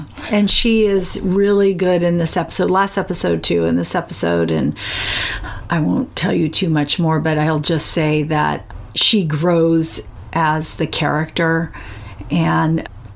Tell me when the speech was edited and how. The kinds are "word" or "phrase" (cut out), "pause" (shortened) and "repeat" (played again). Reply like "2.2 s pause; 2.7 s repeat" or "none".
none